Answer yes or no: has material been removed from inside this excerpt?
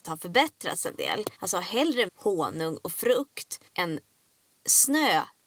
yes